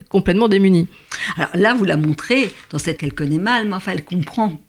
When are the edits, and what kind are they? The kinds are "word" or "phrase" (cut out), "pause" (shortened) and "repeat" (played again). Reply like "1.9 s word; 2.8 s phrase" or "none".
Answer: 3.0 s word